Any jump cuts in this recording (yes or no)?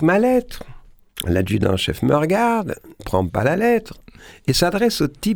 yes